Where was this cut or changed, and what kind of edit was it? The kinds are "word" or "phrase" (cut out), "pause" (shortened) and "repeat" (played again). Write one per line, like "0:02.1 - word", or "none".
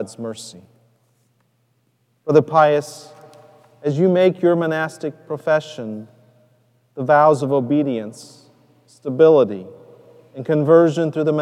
none